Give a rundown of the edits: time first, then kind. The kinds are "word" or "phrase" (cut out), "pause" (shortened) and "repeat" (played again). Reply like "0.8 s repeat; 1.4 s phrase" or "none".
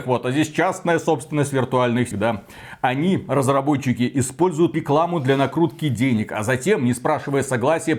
2.1 s word; 4.7 s word